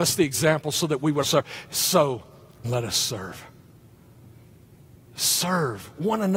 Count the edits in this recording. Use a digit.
2